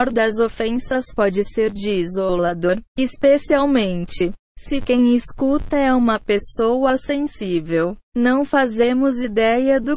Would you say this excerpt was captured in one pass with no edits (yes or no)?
no